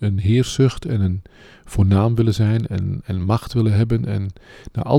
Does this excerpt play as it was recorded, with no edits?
yes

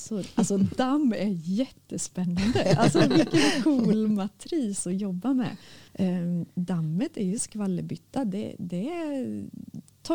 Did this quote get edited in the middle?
yes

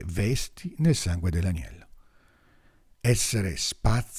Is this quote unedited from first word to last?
yes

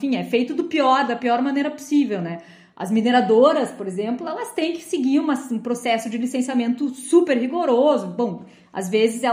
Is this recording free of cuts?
yes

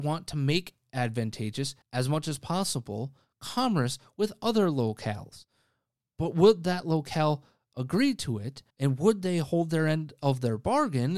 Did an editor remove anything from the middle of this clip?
yes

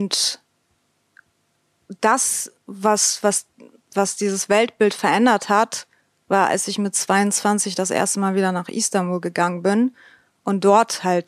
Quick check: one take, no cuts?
yes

